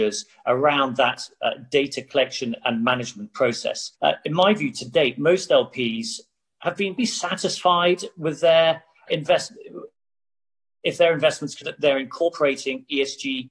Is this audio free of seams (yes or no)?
no